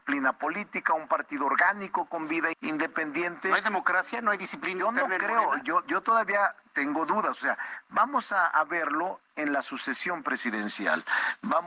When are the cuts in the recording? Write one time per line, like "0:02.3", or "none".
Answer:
0:02.5